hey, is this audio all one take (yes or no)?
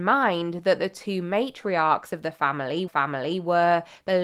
no